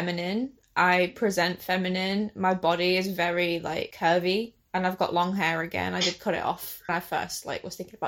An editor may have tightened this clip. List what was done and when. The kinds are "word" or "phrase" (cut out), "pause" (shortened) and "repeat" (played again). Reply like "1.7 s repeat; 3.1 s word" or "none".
6.9 s word